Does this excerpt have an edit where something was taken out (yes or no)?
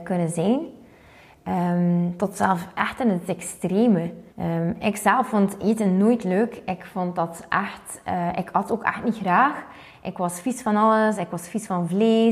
yes